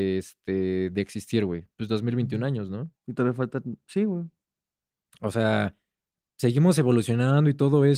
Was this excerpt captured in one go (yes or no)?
no